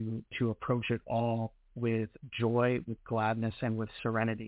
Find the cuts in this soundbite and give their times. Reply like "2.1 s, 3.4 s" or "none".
none